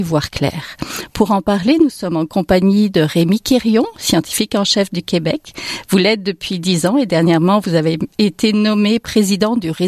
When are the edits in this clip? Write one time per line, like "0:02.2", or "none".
none